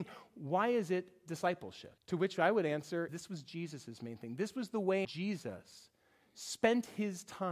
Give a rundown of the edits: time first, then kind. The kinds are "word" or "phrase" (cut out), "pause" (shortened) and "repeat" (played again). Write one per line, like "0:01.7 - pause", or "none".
0:02.0 - pause
0:03.1 - phrase
0:05.0 - phrase